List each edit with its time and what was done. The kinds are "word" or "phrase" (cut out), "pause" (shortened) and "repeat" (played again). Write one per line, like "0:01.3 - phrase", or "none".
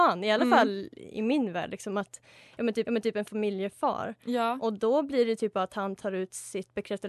0:02.8 - repeat